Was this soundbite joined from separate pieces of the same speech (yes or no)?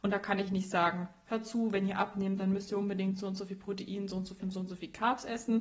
yes